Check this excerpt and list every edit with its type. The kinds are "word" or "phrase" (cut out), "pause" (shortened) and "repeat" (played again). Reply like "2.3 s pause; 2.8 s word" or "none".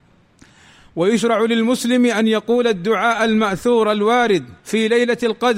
4.6 s pause